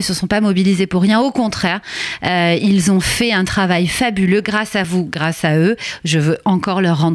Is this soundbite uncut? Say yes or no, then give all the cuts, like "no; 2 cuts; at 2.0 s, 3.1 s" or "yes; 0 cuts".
yes; 0 cuts